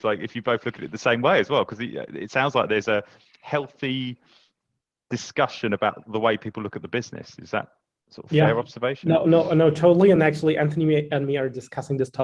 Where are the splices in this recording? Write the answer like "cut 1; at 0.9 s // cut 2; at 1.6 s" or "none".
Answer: none